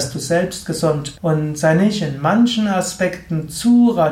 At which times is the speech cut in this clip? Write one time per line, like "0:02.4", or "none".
0:01.1